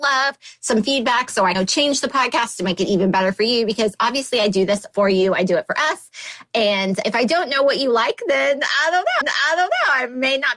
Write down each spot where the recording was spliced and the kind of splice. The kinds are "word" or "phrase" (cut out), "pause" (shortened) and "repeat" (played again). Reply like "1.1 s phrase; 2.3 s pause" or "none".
1.5 s phrase; 7.0 s word; 9.2 s repeat